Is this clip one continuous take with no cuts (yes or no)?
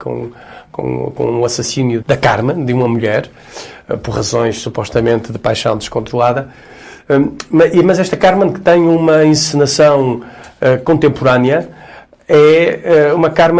no